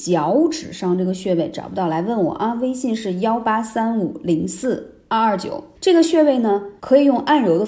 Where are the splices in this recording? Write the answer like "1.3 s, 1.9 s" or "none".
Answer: 5.7 s, 6.8 s